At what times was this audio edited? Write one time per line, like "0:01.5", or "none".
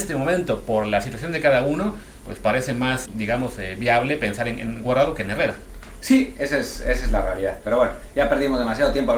0:03.1